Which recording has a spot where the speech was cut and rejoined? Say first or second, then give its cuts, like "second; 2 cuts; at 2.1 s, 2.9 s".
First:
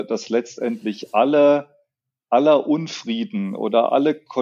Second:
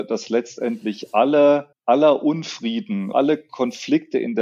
second; 2 cuts; at 1.7 s, 3.1 s